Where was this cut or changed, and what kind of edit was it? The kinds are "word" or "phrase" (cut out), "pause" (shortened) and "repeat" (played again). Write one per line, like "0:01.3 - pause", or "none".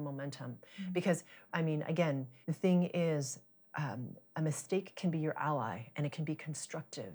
0:01.5 - word
0:02.4 - pause
0:03.6 - pause